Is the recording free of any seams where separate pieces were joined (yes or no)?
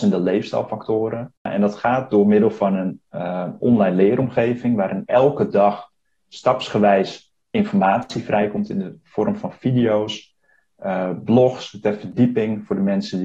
yes